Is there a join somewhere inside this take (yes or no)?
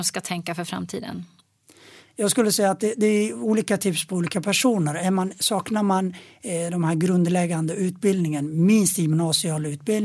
no